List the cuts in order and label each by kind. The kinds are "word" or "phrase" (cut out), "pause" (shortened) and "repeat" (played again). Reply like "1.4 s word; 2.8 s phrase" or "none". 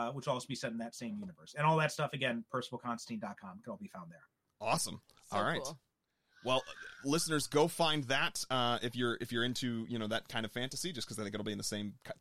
none